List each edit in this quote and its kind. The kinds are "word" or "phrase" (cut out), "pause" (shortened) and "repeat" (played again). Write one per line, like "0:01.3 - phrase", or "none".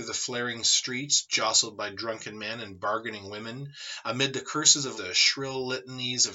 0:04.9 - word